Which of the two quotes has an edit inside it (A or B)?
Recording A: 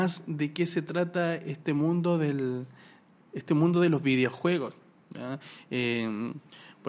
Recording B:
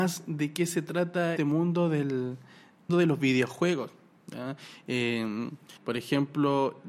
B